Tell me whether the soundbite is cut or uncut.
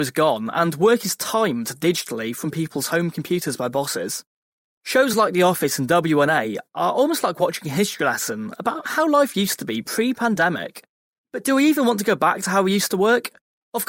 uncut